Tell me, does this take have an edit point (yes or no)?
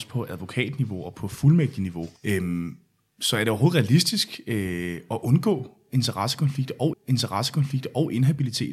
yes